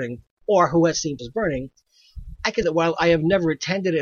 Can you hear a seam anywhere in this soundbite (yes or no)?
yes